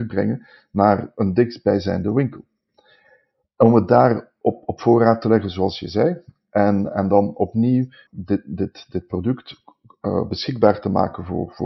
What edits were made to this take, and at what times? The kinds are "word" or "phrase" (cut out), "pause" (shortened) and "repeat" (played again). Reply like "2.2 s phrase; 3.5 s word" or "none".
none